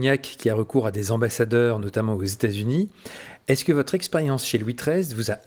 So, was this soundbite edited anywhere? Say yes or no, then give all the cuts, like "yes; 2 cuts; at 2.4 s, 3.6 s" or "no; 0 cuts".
no; 0 cuts